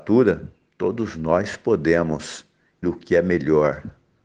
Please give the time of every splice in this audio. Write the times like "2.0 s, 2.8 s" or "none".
2.8 s